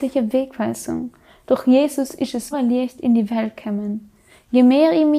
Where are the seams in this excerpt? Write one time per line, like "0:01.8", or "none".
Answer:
0:02.5